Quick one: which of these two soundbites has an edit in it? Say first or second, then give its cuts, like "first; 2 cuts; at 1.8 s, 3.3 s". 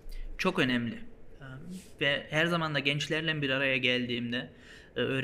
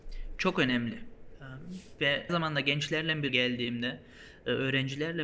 second; 2 cuts; at 2.3 s, 3.3 s